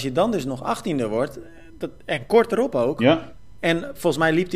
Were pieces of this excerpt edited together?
no; 0 cuts

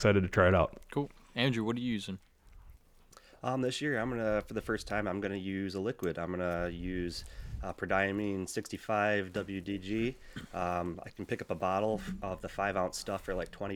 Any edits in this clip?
no; 0 cuts

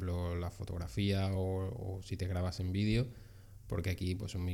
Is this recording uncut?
yes; 0 cuts

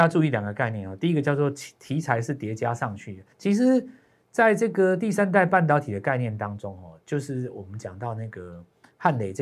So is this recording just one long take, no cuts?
no; 1 cut; at 3.3 s

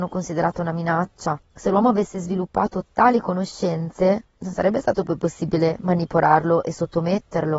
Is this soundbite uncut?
yes; 0 cuts

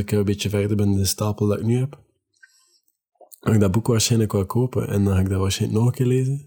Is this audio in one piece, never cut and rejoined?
yes; 0 cuts

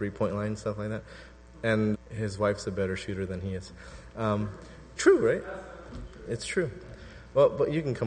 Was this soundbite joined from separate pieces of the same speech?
yes; 2 cuts; at 1.9 s, 5.0 s

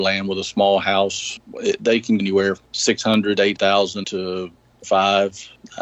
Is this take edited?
yes; 6 cuts; at 1.4 s, 2.2 s, 2.6 s, 3.6 s, 4.0 s, 4.8 s

